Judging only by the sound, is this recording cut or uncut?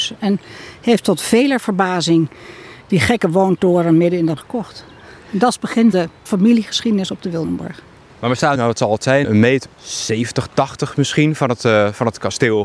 cut